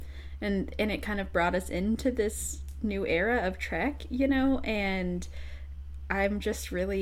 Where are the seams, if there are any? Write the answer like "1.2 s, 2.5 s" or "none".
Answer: none